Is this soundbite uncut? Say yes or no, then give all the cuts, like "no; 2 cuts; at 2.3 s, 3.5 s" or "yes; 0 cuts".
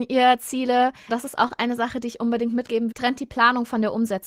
no; 2 cuts; at 1.1 s, 2.9 s